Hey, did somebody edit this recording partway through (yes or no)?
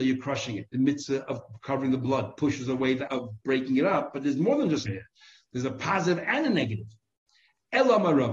yes